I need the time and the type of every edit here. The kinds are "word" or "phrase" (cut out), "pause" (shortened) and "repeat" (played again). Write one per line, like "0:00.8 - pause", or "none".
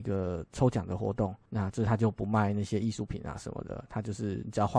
0:01.5 - pause